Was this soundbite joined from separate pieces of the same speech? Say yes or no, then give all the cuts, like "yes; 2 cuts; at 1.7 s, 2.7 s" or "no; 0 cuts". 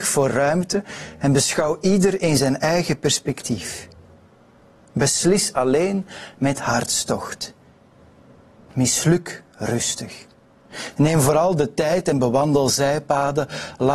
no; 0 cuts